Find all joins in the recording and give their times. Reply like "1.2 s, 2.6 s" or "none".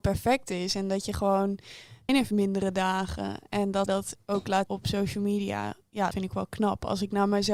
2.1 s, 3.9 s, 4.7 s, 6.1 s